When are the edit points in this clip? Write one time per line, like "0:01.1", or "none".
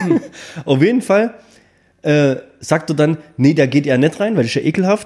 none